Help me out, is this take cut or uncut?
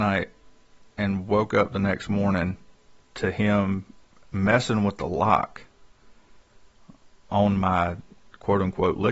uncut